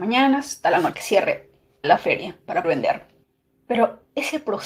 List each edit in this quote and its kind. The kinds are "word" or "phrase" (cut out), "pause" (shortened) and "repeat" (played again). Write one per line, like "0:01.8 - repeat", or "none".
0:00.9 - word
0:01.8 - word
0:02.6 - word
0:03.2 - pause